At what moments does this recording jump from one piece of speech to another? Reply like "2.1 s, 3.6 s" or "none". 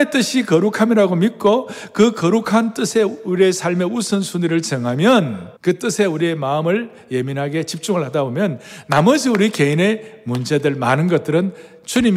5.6 s